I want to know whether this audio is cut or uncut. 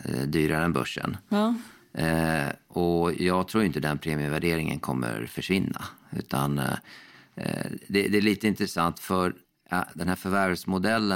cut